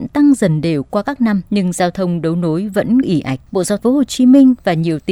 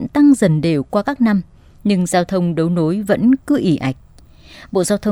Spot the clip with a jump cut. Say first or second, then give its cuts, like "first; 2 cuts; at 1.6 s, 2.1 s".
first; 4 cuts; at 1.5 s, 3.0 s, 3.5 s, 3.8 s